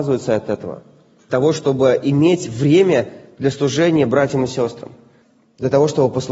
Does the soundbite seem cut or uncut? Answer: cut